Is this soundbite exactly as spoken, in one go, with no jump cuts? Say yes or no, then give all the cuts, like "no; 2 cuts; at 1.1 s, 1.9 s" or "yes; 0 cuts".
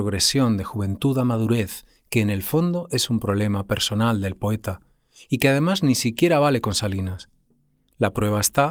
yes; 0 cuts